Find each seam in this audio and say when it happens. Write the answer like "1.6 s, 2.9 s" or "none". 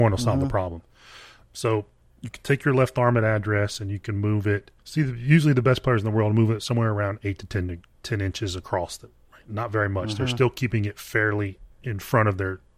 2.0 s, 4.8 s